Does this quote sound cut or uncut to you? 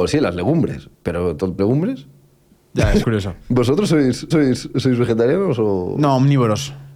cut